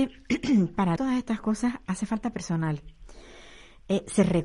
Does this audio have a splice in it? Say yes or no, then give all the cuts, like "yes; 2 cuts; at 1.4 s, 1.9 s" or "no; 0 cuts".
yes; 1 cut; at 1.0 s